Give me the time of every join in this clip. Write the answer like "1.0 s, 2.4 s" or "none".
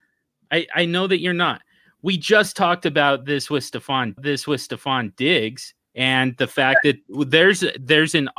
4.2 s